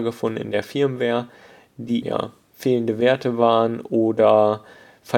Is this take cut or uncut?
cut